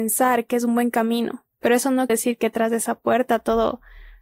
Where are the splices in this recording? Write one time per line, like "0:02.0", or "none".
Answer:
0:01.5
0:02.1